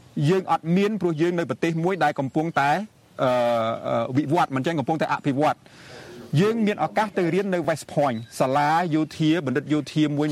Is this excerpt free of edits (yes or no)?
yes